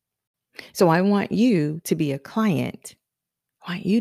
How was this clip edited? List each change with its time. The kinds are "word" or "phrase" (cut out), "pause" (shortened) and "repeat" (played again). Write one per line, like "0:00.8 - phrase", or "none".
none